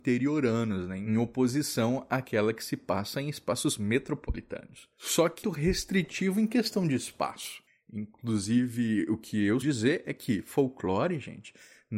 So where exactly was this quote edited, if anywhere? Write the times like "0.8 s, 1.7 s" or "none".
5.4 s, 9.6 s